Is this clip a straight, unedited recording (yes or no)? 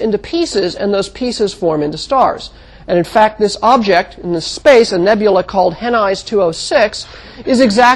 yes